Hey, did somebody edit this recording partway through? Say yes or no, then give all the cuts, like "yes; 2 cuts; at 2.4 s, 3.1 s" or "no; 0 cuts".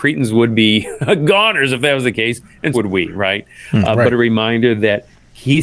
yes; 1 cut; at 2.7 s